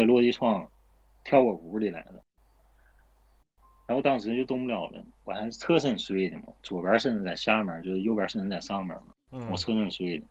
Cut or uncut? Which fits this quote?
uncut